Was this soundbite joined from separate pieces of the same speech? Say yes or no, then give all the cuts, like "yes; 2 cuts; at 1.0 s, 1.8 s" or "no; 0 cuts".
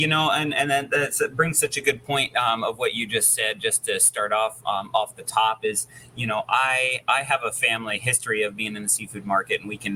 no; 0 cuts